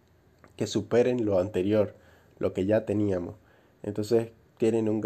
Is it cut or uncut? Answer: uncut